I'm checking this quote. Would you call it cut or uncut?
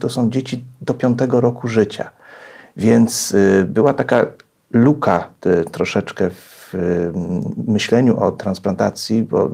uncut